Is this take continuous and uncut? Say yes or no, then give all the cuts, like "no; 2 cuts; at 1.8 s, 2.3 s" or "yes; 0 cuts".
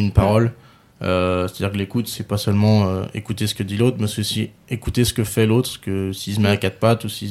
yes; 0 cuts